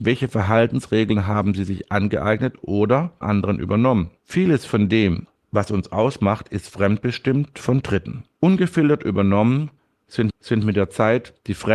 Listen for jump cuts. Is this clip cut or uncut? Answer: cut